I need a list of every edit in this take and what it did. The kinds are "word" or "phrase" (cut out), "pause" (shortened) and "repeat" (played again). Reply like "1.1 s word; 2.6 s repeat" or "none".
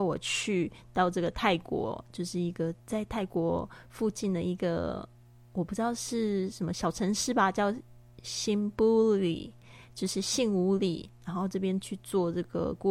2.8 s pause